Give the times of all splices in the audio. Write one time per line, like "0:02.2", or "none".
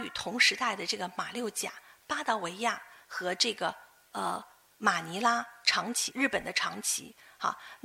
none